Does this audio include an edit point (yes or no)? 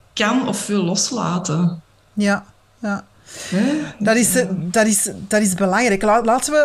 no